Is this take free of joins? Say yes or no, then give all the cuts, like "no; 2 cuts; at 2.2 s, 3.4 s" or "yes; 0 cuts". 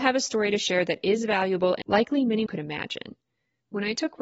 no; 2 cuts; at 1.8 s, 2.5 s